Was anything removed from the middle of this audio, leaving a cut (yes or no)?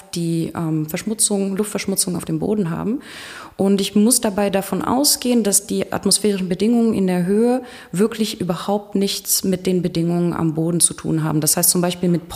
no